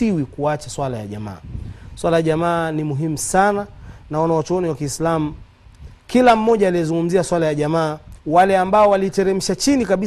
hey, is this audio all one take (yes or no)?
no